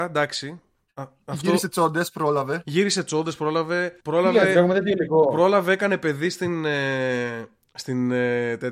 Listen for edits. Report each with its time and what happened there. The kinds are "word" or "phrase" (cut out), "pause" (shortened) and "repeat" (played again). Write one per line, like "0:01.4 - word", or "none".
0:04.0 - pause